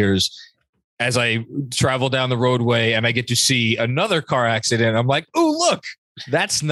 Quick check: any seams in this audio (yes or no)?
no